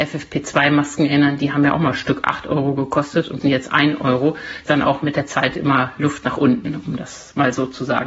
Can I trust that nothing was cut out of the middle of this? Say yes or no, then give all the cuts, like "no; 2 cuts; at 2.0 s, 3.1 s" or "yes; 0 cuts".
no; 2 cuts; at 3.4 s, 4.7 s